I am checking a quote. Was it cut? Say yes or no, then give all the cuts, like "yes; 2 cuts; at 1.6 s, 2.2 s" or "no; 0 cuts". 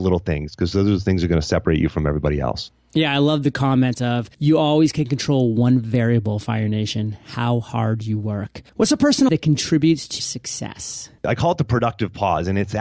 yes; 5 cuts; at 4.3 s, 8.7 s, 9.3 s, 10.2 s, 11.2 s